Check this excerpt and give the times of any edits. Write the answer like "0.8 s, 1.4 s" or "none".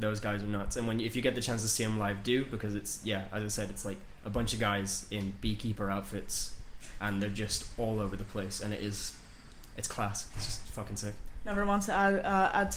none